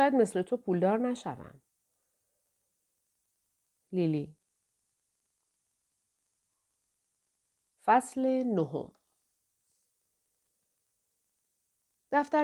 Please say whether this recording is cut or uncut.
uncut